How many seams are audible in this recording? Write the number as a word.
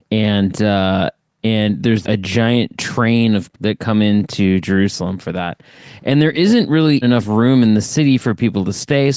three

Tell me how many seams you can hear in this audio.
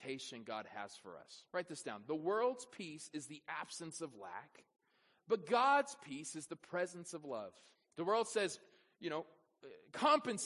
two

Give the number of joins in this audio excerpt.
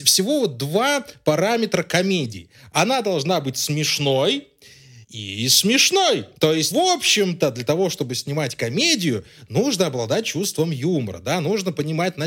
three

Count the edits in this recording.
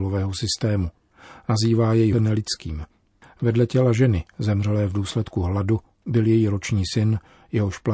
one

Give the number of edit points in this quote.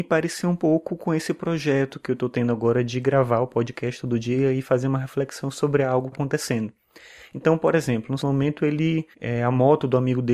three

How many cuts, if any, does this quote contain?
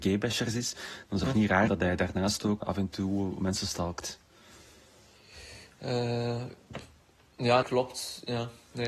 four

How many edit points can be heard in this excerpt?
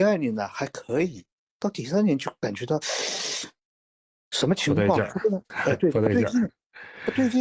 zero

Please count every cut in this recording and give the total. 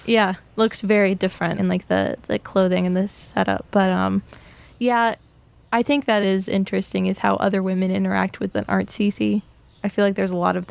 three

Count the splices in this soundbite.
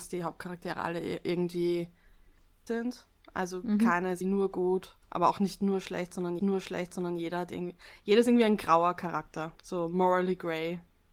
six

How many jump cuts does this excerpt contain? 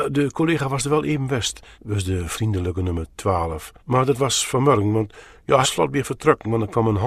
three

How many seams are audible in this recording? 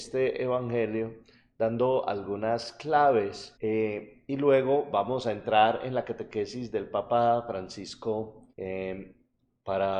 two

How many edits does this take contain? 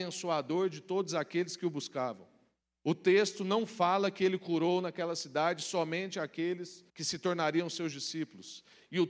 two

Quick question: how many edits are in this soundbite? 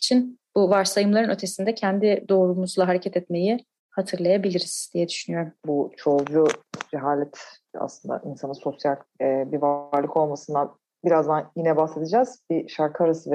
two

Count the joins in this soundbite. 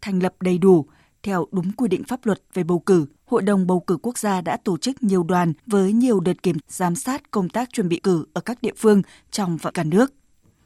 five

